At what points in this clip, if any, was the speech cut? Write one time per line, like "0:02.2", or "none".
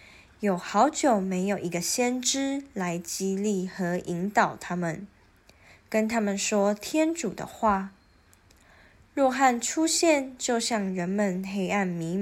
none